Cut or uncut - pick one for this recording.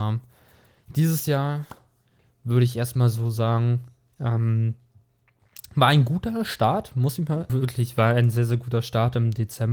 cut